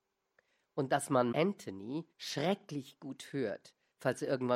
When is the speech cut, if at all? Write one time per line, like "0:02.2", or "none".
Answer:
0:01.3
0:02.1